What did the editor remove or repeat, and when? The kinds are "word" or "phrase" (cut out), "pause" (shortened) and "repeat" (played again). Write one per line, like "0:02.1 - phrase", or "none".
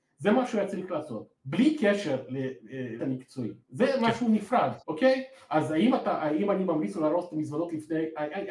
0:01.4 - pause
0:03.0 - word
0:03.6 - pause
0:04.8 - pause